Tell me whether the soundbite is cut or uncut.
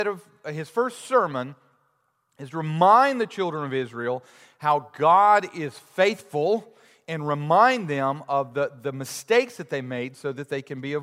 uncut